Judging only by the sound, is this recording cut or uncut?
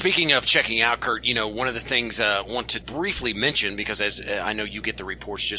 cut